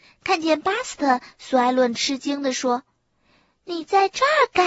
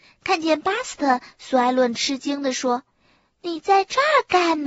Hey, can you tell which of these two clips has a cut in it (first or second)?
second